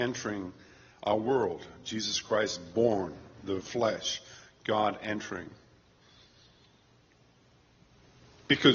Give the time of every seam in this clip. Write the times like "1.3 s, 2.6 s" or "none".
3.6 s